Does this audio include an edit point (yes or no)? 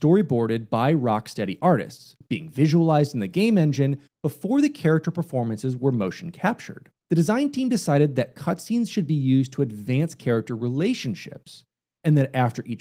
yes